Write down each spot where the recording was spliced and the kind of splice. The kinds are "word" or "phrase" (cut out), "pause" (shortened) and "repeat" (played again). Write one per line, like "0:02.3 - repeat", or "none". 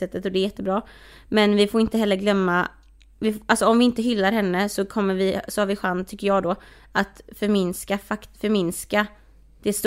0:08.3 - pause